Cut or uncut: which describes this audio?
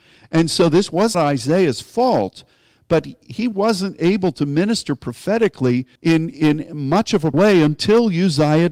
cut